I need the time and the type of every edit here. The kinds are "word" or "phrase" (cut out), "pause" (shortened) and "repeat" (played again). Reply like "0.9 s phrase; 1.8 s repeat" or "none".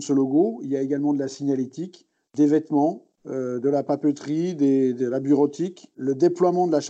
2.2 s pause; 3.2 s pause